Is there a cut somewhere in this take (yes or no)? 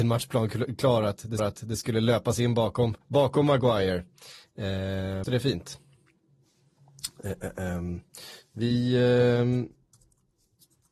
yes